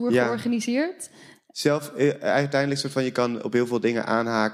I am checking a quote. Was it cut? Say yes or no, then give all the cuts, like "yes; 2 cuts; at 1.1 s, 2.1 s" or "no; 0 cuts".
no; 0 cuts